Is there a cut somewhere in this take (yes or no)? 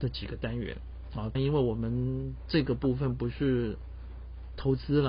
yes